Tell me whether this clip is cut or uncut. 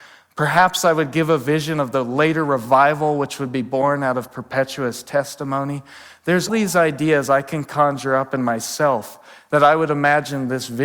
cut